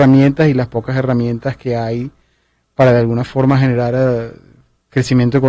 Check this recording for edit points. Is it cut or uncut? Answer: uncut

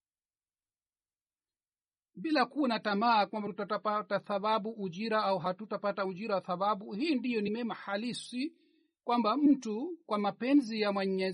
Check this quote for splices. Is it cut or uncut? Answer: uncut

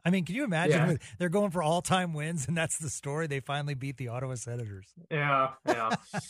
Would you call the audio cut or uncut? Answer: uncut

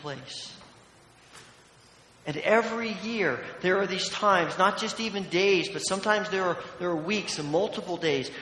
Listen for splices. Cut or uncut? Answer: uncut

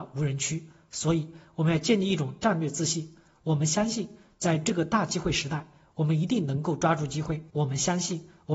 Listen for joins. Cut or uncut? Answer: cut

